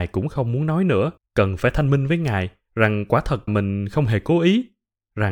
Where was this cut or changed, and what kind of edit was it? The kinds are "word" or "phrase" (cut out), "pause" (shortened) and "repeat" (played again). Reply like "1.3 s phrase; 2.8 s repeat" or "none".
1.2 s pause; 3.5 s word